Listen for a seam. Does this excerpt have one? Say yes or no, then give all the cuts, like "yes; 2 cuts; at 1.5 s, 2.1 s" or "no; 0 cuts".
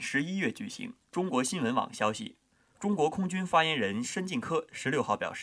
yes; 1 cut; at 1.0 s